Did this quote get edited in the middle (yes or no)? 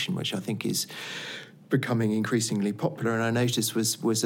no